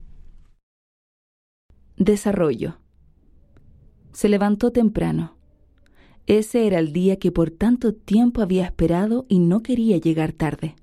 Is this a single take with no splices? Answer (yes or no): yes